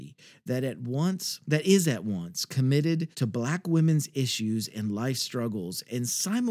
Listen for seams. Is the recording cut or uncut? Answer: cut